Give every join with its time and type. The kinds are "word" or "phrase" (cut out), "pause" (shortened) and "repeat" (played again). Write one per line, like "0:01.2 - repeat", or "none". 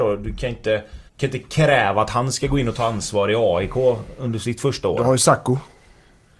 0:01.1 - pause